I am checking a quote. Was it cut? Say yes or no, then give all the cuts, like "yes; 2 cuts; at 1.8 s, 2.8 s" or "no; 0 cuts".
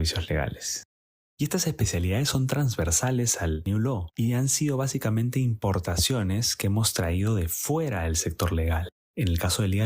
no; 0 cuts